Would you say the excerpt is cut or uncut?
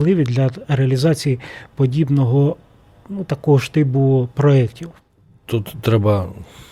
uncut